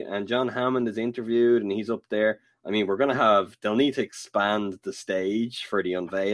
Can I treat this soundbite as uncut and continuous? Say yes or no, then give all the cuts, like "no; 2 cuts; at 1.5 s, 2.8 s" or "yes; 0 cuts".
yes; 0 cuts